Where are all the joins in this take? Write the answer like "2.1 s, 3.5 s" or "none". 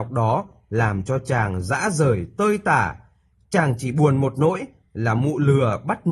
none